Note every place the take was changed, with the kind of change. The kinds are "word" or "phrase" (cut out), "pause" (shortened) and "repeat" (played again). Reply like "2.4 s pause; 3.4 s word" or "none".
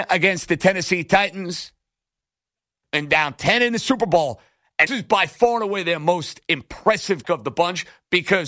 4.9 s word; 7.2 s word